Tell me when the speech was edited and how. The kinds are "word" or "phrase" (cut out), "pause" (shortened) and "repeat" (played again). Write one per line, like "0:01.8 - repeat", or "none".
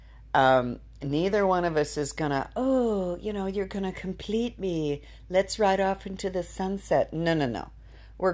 none